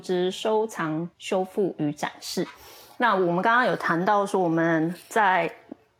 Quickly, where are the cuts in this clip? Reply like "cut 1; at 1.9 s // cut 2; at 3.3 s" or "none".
cut 1; at 1.1 s